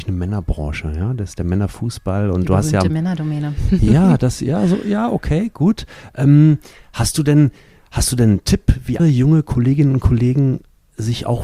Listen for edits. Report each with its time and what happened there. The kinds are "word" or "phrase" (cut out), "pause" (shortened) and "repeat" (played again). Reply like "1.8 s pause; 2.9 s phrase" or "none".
9.0 s word